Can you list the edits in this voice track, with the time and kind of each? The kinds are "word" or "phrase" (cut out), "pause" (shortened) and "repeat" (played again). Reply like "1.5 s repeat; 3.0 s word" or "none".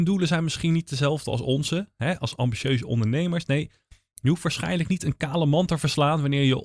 none